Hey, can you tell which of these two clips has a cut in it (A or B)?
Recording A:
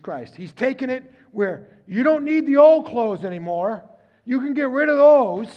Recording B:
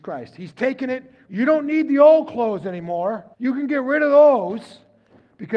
B